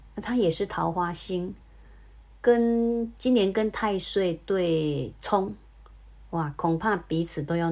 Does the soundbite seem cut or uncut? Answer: uncut